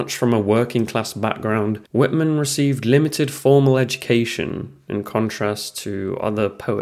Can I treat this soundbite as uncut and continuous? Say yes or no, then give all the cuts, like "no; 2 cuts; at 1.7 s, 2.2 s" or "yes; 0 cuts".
no; 1 cut; at 1.9 s